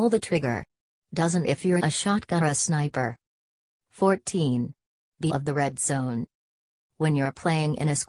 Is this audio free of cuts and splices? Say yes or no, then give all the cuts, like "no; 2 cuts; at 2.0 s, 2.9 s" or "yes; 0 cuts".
no; 4 cuts; at 1.4 s, 1.8 s, 2.4 s, 5.3 s